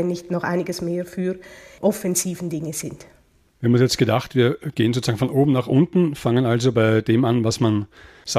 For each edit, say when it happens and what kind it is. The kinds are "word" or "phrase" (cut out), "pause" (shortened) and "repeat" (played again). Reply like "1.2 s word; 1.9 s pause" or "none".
none

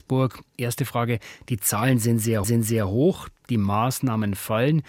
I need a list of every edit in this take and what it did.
2.4 s repeat

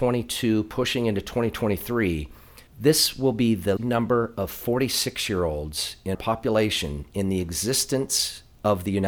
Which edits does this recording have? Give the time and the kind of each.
2.7 s pause; 3.8 s word; 6.1 s word

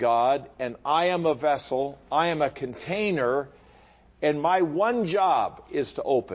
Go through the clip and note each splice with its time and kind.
none

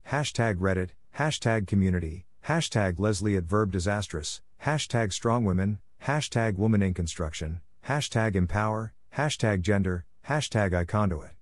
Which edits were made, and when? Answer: none

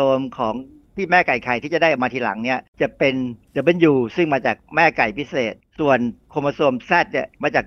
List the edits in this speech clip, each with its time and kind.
2.7 s pause

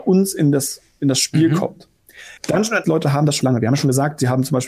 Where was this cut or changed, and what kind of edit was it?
2.4 s pause; 2.8 s word; 3.4 s word

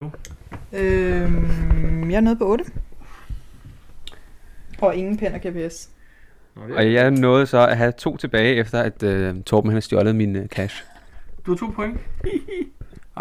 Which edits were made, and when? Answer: none

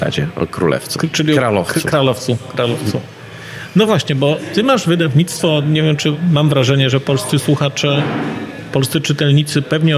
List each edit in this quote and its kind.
none

